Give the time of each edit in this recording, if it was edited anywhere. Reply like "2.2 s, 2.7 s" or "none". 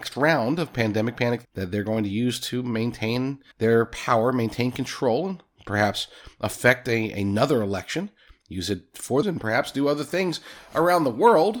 1.4 s, 3.5 s, 9.2 s